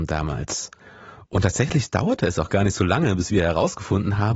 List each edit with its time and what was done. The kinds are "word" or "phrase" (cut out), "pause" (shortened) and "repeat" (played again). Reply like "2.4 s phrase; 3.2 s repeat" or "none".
none